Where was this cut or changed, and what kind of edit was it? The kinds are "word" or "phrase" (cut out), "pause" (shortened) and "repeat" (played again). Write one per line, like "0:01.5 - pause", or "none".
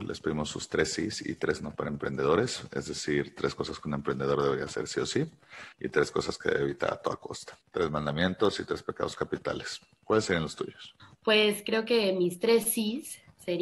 0:05.7 - pause
0:07.6 - pause
0:11.0 - pause